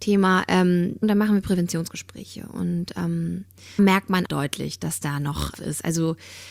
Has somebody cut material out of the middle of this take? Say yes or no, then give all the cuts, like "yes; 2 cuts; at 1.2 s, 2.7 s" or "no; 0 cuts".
yes; 4 cuts; at 1.0 s, 3.8 s, 4.3 s, 5.5 s